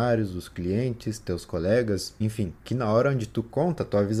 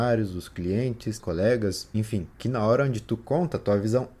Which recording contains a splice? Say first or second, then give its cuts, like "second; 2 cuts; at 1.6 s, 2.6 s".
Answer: second; 1 cut; at 1.2 s